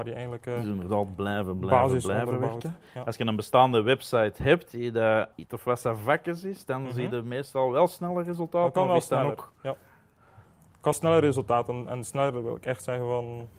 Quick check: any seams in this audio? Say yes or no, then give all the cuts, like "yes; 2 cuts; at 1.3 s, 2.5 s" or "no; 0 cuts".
yes; 2 cuts; at 5.3 s, 10.9 s